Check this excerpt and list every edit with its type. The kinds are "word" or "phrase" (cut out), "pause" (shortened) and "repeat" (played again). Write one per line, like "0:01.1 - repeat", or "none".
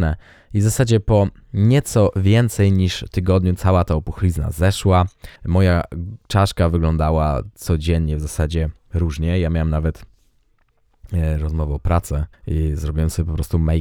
0:05.4 - pause
0:12.3 - pause